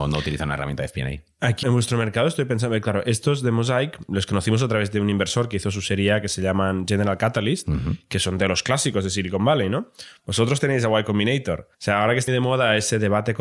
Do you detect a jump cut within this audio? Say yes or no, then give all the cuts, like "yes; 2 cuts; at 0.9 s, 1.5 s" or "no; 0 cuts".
yes; 4 cuts; at 1.6 s, 4.1 s, 11.7 s, 12.3 s